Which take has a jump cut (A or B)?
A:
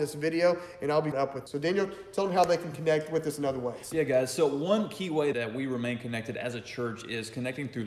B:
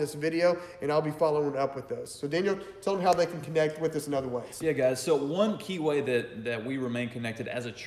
A